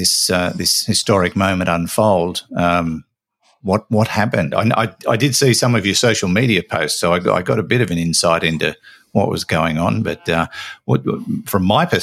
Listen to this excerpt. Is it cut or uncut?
uncut